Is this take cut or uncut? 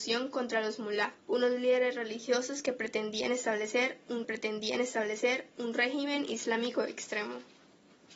cut